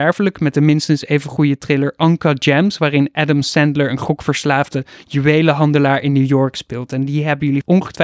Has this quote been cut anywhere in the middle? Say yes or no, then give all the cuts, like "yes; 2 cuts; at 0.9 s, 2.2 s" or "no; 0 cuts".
no; 0 cuts